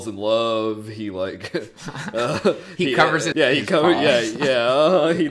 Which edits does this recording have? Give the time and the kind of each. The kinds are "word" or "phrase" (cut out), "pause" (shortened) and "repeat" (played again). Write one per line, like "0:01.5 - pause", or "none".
0:03.3 - phrase

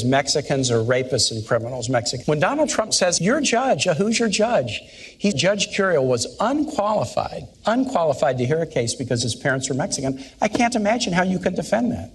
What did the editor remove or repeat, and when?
0:02.2 - word
0:03.2 - word
0:05.3 - phrase
0:07.5 - pause

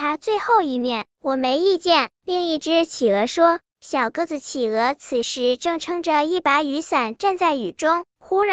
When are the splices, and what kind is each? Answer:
0:03.7 - pause

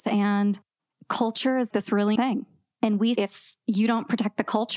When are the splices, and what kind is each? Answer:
0:01.7 - word
0:02.2 - word
0:03.2 - word

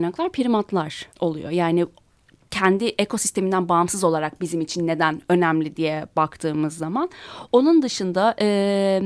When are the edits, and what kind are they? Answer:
0:01.1 - pause

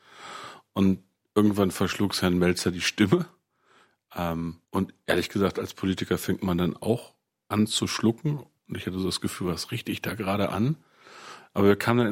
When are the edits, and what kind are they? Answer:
0:04.6 - pause

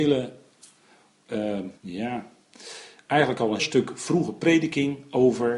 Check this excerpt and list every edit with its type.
0:01.8 - pause
0:03.6 - word

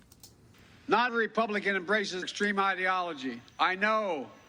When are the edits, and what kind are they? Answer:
0:01.1 - word
0:02.2 - word
0:03.5 - pause

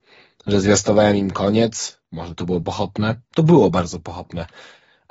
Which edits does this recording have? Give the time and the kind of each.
0:02.6 - word

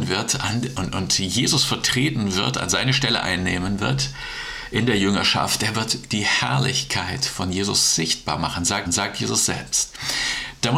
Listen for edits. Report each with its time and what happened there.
0:08.9 - repeat

